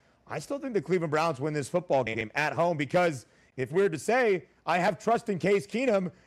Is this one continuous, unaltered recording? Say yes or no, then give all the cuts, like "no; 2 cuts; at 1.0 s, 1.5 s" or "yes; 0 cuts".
no; 1 cut; at 3.7 s